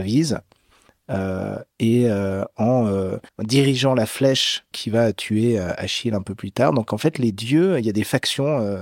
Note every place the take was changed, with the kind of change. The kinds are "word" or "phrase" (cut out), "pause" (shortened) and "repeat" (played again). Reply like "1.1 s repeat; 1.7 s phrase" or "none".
3.3 s pause; 4.7 s word